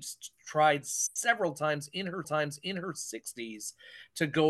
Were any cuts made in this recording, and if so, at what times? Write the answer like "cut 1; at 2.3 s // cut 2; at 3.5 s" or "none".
cut 1; at 2.2 s